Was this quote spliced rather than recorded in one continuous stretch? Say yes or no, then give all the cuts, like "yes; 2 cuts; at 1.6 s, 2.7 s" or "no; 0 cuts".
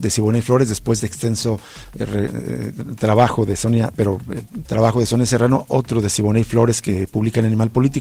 yes; 2 cuts; at 1.0 s, 4.6 s